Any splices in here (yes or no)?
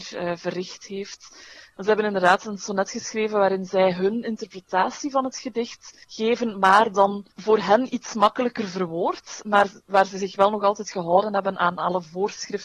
yes